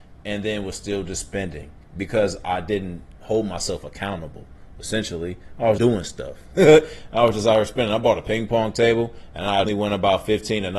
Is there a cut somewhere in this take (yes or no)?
yes